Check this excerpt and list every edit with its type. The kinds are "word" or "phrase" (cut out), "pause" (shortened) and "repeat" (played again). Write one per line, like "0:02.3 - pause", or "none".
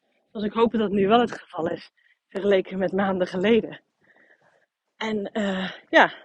none